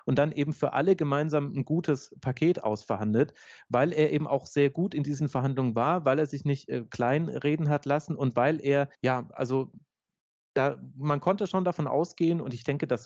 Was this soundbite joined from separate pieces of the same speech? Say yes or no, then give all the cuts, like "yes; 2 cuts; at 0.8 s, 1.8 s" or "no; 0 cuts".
yes; 1 cut; at 8.9 s